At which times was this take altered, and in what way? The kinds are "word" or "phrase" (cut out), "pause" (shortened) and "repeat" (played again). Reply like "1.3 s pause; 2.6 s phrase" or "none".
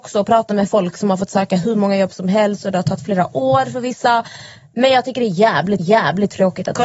5.8 s repeat